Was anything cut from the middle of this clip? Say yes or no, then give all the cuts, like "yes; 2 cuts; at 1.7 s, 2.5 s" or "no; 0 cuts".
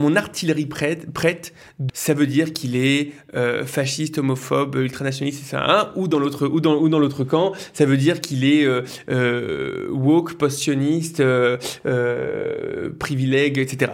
yes; 1 cut; at 1.9 s